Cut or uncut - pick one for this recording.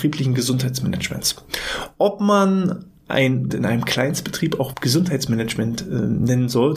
cut